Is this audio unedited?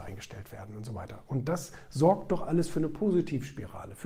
yes; 0 cuts

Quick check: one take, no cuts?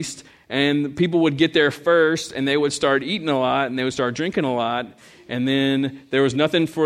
yes; 0 cuts

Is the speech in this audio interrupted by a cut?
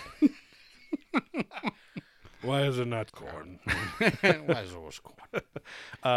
yes; 1 cut; at 3.1 s

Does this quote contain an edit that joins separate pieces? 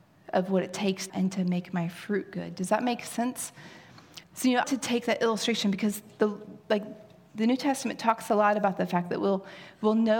yes; 3 cuts; at 1.1 s, 4.2 s, 4.6 s

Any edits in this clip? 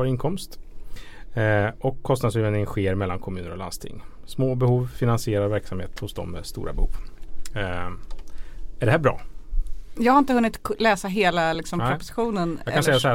no; 0 cuts

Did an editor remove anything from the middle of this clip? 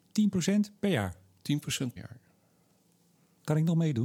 yes; 1 cut; at 2.0 s

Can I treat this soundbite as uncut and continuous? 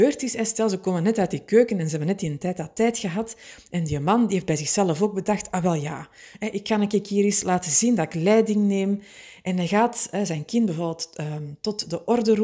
yes; 0 cuts

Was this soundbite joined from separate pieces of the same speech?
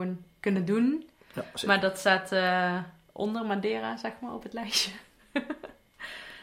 no; 0 cuts

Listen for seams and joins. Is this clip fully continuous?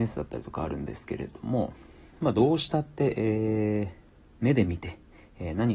yes; 0 cuts

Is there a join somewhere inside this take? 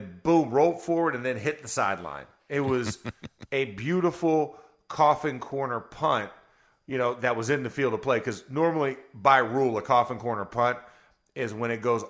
no; 0 cuts

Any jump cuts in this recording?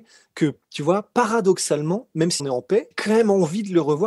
yes; 2 cuts; at 2.4 s, 2.9 s

